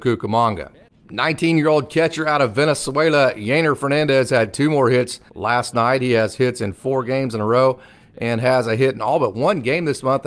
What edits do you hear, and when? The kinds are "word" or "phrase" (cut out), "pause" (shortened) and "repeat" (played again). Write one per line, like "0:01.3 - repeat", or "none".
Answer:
0:05.3 - pause